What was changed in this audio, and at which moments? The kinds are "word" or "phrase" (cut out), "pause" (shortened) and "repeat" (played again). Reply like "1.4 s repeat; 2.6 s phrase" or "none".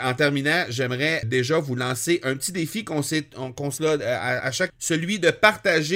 1.2 s word; 3.8 s word; 4.4 s word; 4.7 s word